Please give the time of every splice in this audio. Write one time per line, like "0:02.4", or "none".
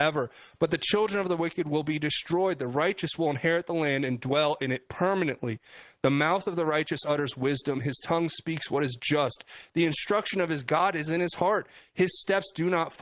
none